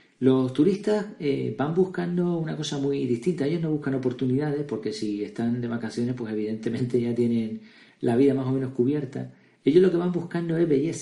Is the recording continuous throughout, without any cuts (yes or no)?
yes